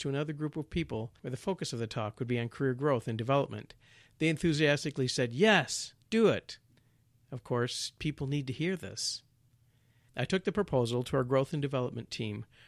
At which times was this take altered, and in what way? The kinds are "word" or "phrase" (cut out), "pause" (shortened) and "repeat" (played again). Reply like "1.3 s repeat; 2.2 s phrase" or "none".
none